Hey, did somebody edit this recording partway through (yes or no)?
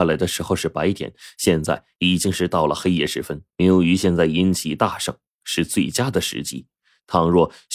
yes